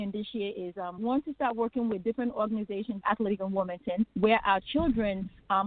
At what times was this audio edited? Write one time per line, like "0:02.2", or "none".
0:01.0
0:03.0
0:03.4
0:04.1